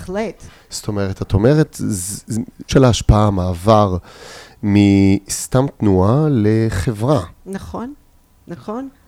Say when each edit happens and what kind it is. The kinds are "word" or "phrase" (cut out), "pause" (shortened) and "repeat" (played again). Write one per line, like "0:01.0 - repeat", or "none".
0:02.7 - phrase